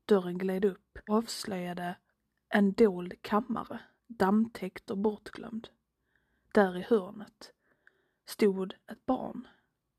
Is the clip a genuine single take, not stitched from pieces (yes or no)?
no